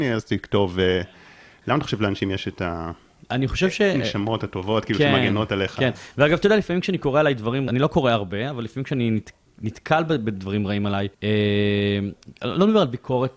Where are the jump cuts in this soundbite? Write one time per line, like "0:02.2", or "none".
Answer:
0:07.7
0:11.1